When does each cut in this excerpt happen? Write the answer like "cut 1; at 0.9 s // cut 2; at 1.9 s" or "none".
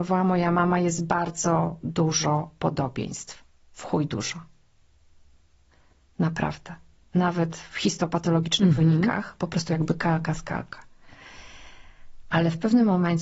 none